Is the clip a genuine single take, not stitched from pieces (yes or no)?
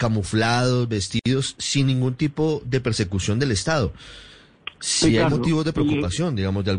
yes